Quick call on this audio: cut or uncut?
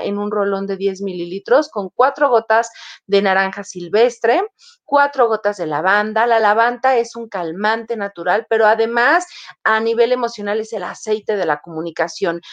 uncut